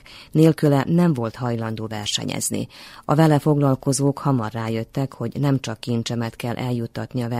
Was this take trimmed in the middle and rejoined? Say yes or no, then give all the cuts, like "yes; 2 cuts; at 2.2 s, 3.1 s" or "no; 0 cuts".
no; 0 cuts